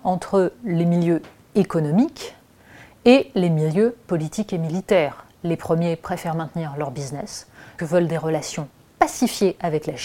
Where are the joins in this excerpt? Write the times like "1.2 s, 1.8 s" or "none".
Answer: 7.8 s